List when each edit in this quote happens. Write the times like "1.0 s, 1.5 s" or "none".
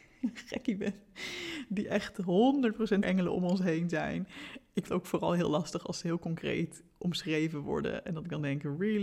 3.0 s, 4.8 s